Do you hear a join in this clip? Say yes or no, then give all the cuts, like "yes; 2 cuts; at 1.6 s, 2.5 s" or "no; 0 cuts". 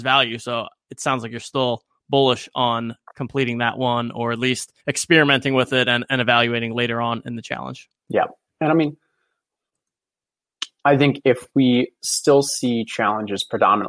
yes; 2 cuts; at 4.8 s, 8.0 s